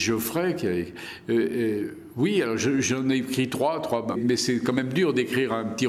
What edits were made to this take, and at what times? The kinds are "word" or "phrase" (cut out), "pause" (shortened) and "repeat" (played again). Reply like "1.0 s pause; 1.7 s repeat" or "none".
4.1 s word